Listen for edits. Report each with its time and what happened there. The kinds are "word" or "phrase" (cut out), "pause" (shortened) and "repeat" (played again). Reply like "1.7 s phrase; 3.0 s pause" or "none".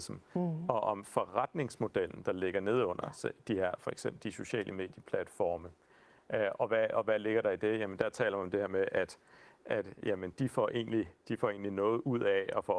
none

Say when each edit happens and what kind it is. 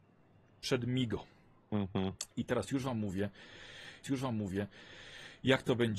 4.0 s repeat

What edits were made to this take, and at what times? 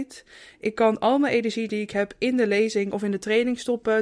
none

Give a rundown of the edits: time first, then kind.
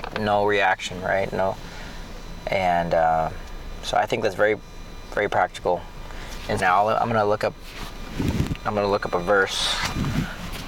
6.6 s phrase

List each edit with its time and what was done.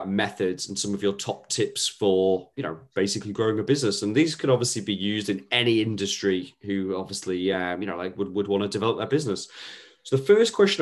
none

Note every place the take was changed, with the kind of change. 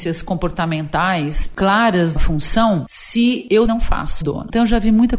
2.2 s word; 3.7 s word; 4.2 s word

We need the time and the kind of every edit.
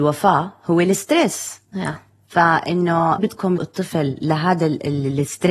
3.2 s word; 3.6 s word

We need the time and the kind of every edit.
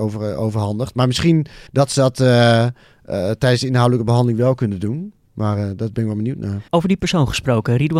1.7 s pause; 6.7 s pause

